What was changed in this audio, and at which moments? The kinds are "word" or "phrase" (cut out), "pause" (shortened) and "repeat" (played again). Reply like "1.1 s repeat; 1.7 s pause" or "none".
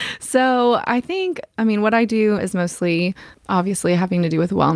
2.4 s word